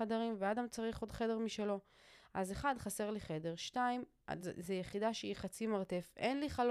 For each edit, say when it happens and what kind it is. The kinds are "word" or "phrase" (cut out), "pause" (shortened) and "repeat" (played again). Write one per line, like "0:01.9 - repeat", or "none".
none